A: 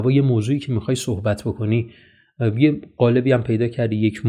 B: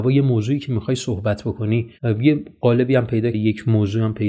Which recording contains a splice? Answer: B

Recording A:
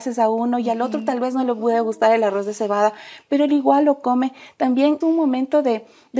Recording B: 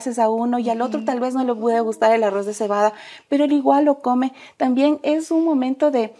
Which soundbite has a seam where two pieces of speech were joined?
A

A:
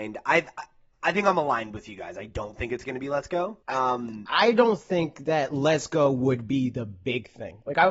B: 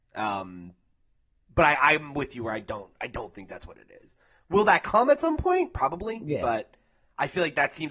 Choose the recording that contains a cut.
A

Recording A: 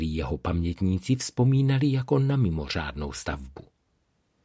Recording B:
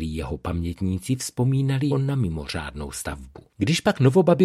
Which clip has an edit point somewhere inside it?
B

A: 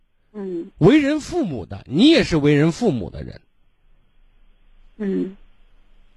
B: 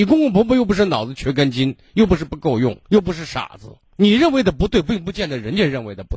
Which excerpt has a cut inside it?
B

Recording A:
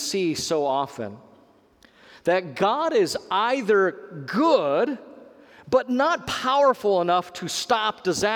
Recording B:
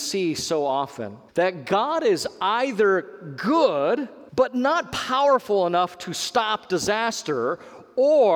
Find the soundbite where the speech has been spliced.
B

